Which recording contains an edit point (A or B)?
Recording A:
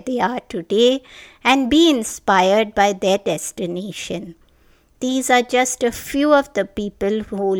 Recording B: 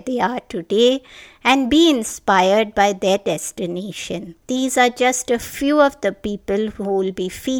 B